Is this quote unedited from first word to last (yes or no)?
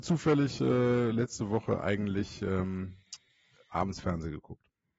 yes